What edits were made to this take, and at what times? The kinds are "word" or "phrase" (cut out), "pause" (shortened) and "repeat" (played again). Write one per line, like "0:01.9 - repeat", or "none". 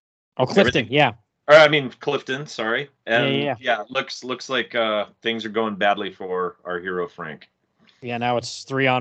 none